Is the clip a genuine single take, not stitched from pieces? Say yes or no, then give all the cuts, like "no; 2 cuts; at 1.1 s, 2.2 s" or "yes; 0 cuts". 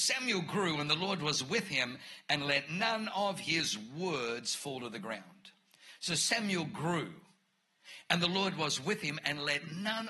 yes; 0 cuts